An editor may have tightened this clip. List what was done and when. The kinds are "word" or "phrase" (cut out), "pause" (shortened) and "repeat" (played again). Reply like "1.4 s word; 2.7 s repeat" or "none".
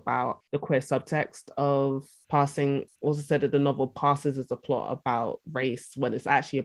none